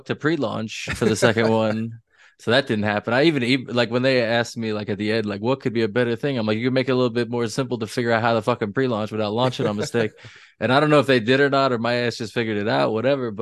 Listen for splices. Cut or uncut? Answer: uncut